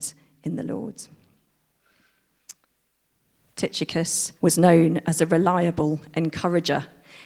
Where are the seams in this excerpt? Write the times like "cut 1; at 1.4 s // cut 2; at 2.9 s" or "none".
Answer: cut 1; at 4.4 s